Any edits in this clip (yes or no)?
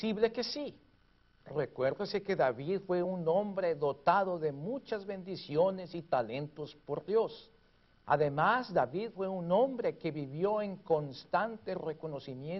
no